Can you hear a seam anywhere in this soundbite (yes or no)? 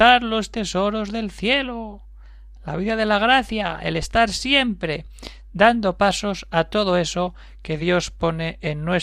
no